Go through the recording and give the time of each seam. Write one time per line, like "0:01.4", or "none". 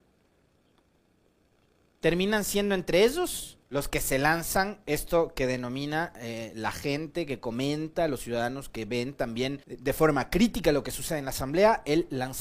0:03.6
0:09.6